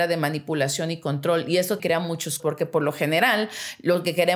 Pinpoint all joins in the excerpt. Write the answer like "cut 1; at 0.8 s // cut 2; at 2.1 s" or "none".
cut 1; at 1.8 s // cut 2; at 2.4 s